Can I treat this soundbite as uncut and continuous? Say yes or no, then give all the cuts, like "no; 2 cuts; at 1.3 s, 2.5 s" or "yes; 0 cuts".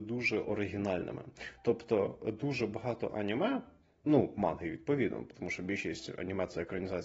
yes; 0 cuts